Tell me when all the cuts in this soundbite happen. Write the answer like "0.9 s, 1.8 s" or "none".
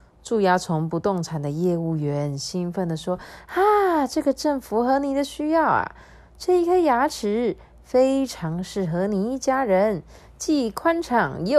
none